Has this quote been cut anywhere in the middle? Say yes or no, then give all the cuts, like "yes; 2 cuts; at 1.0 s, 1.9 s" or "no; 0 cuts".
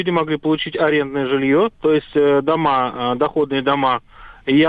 yes; 1 cut; at 1.7 s